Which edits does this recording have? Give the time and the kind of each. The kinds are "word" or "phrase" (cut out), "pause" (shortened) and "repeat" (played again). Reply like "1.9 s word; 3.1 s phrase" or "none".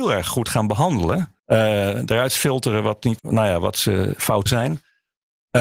1.4 s pause; 3.2 s word; 4.5 s word